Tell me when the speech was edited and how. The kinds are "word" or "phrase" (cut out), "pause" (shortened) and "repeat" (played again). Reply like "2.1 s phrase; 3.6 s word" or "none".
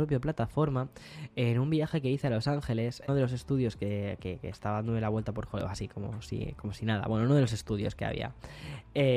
3.1 s phrase; 5.5 s phrase